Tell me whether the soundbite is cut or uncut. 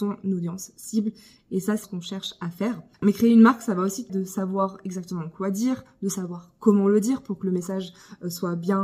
cut